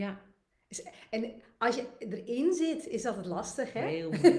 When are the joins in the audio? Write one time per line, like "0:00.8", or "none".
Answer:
none